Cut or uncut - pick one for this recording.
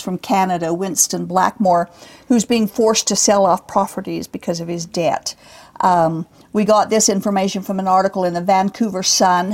uncut